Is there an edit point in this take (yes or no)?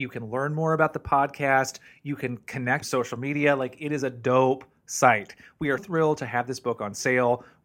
yes